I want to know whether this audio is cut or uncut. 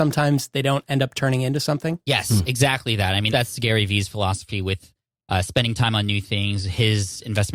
cut